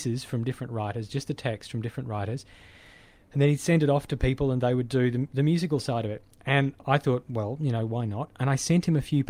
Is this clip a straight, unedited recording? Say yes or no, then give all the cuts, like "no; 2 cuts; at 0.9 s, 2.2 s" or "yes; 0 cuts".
yes; 0 cuts